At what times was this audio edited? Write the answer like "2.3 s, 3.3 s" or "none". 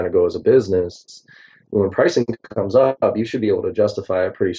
none